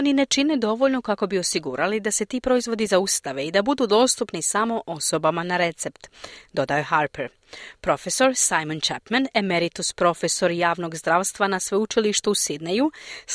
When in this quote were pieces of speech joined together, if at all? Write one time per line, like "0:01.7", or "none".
none